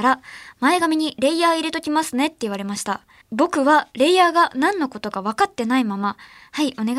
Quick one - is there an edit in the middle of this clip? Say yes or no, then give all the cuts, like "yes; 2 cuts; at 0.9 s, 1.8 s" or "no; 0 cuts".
yes; 1 cut; at 3.2 s